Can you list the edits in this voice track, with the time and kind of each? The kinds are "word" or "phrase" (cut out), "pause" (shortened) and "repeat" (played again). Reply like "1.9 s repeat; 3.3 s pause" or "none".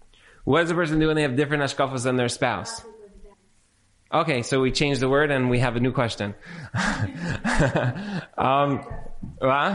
3.3 s pause